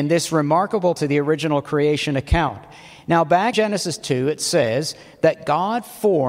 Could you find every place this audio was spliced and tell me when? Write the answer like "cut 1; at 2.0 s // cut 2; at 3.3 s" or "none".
cut 1; at 1.0 s // cut 2; at 3.5 s

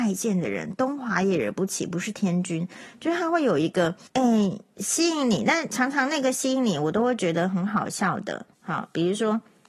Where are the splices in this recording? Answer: cut 1; at 4.1 s // cut 2; at 8.5 s

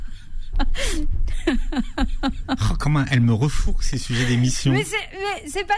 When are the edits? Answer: none

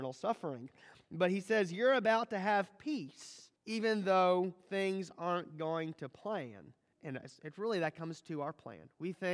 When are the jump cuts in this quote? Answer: cut 1; at 3.6 s // cut 2; at 6.9 s

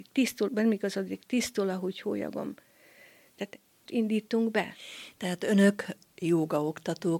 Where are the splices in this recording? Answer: cut 1; at 3.9 s

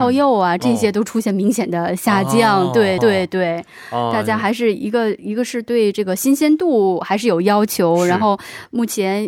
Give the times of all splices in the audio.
cut 1; at 3.0 s

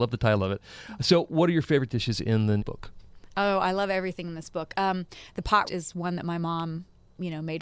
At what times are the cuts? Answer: cut 1; at 2.6 s // cut 2; at 5.6 s

